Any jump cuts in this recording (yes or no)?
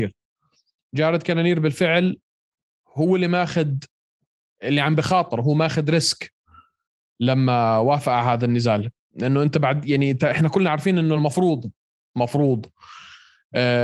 no